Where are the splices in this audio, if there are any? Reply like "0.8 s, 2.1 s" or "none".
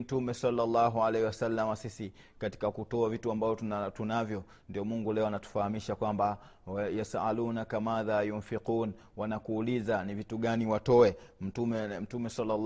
none